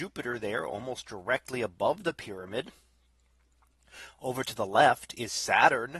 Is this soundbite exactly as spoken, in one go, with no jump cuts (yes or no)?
yes